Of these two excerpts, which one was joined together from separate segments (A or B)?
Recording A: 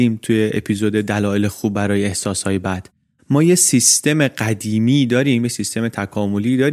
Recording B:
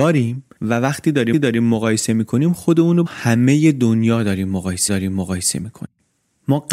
B